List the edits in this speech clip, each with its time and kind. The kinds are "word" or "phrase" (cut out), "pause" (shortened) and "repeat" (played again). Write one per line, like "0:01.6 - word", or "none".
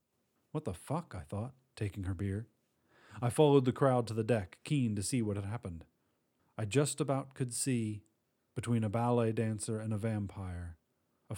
none